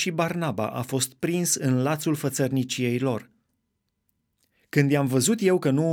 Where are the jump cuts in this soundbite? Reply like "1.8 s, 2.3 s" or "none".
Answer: none

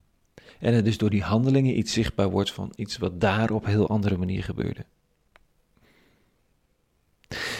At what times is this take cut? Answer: none

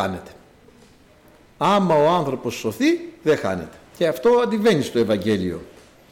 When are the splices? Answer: 3.9 s

